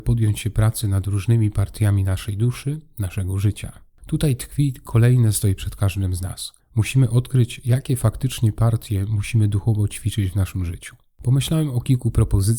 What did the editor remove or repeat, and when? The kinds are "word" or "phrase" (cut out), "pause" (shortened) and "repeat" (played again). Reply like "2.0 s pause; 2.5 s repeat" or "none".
5.3 s phrase; 6.6 s pause